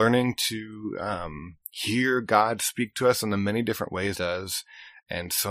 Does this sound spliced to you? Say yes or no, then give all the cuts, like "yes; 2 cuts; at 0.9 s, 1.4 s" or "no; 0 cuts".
yes; 1 cut; at 4.1 s